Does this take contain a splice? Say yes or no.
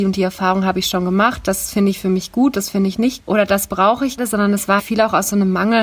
yes